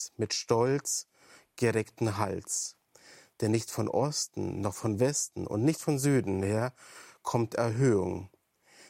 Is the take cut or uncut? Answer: uncut